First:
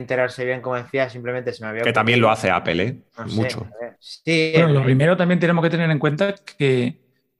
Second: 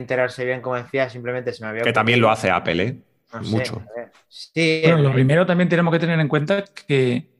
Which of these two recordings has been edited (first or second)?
first